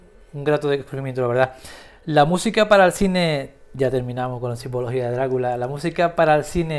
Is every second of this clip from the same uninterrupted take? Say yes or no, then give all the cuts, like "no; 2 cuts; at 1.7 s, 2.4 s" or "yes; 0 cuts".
yes; 0 cuts